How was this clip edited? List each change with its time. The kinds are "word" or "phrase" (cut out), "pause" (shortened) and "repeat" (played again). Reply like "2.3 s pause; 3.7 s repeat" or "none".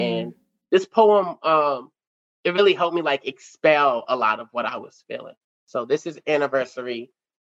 5.4 s pause